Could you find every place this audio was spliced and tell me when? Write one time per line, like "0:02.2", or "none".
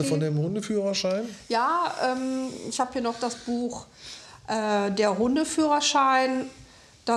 none

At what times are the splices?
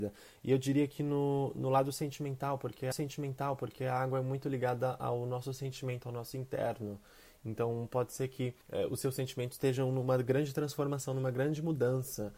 0:02.9
0:08.6

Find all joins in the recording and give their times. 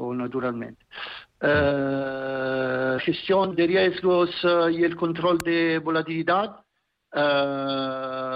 0:03.0
0:03.5

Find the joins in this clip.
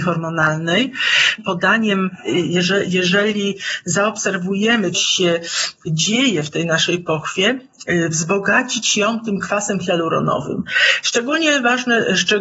0:01.4
0:04.9

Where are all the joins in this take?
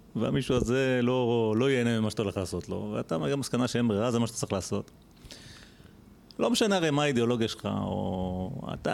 none

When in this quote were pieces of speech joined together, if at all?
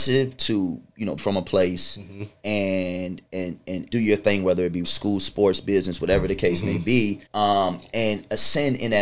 0:01.2
0:03.3
0:03.9
0:04.8
0:07.3

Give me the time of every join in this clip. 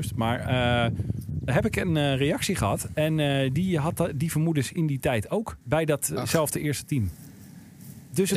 0:05.6

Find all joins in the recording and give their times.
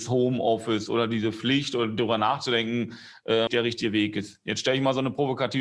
0:03.5

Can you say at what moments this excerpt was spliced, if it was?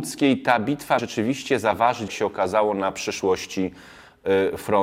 0:01.0
0:02.1

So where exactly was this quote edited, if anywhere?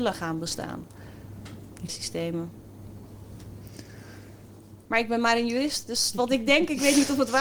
0:01.9
0:04.9
0:06.1

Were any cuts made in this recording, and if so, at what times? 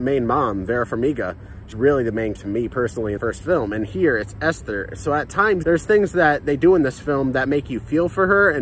0:01.7
0:02.3
0:03.2
0:05.6

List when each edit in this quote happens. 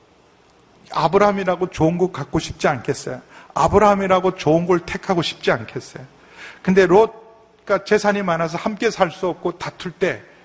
none

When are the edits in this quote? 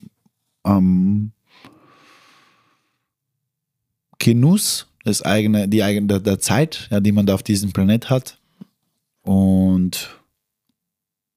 none

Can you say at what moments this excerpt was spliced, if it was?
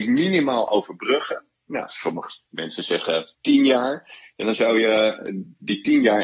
0:03.3

